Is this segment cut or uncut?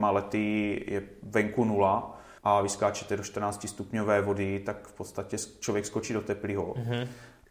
cut